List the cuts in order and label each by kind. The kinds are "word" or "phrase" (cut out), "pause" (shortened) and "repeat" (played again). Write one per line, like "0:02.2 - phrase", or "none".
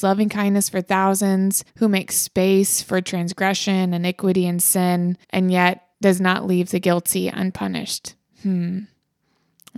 0:01.7 - pause
0:05.2 - pause
0:05.9 - pause